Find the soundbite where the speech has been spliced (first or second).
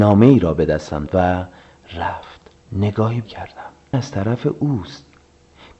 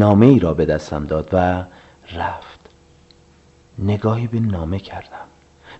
first